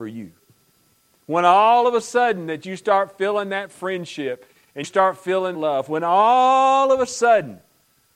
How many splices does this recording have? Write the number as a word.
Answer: two